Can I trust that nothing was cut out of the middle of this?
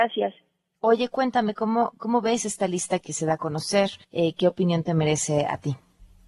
no; 3 cuts; at 2.0 s, 3.0 s, 4.0 s

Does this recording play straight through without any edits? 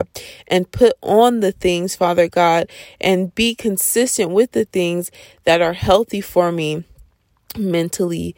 yes; 0 cuts

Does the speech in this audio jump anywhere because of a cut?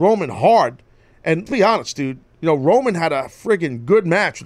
yes; 1 cut; at 1.5 s

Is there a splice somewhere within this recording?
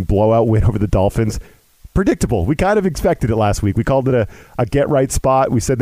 no; 0 cuts

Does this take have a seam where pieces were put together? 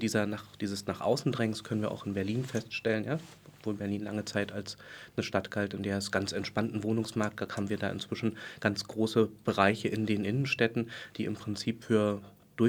no; 0 cuts

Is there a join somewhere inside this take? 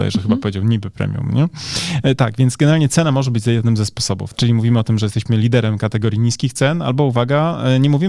no; 0 cuts

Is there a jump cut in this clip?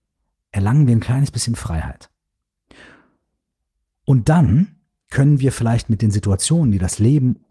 no; 0 cuts

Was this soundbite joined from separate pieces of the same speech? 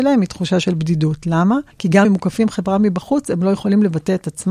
yes; 2 cuts; at 1.7 s, 2.0 s

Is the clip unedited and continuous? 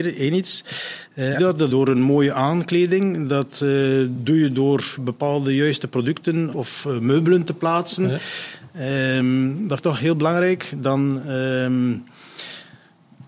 no; 5 cuts; at 1.4 s, 1.7 s, 5.0 s, 6.5 s, 9.8 s

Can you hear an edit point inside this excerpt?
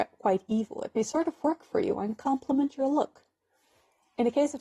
no; 0 cuts

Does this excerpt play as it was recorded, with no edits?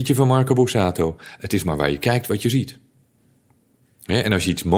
yes; 0 cuts

